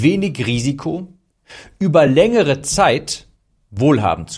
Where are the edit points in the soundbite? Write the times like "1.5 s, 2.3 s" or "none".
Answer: none